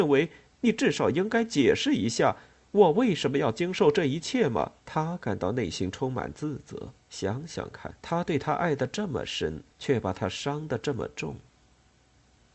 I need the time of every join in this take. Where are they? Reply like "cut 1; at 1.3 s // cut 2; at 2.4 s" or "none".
cut 1; at 4.8 s // cut 2; at 7.0 s // cut 3; at 8.0 s // cut 4; at 9.7 s

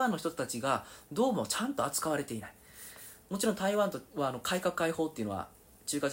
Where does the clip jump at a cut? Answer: cut 1; at 4.1 s

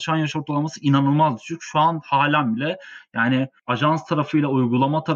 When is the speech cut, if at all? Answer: none

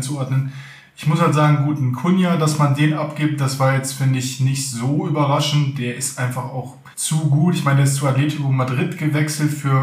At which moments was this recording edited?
cut 1; at 6.9 s

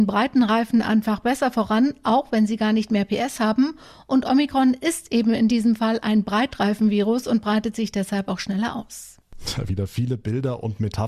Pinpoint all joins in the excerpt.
none

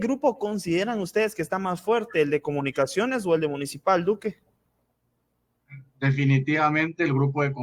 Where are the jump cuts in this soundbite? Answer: none

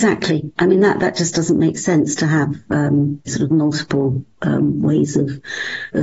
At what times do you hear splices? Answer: cut 1; at 3.3 s

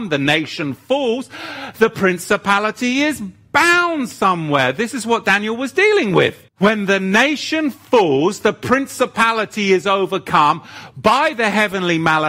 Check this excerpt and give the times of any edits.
cut 1; at 6.5 s

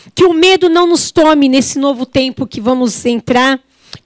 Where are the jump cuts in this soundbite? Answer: none

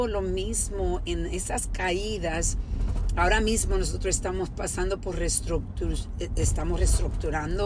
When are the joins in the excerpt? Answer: none

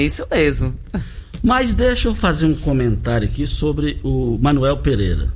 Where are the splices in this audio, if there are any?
none

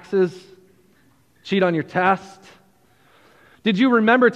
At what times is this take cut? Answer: none

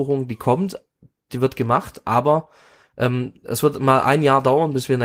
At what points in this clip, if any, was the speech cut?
cut 1; at 3.4 s

